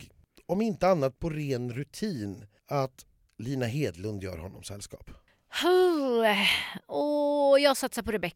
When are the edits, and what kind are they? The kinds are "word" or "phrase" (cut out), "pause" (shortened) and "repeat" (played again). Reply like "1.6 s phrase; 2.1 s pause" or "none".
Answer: 1.2 s word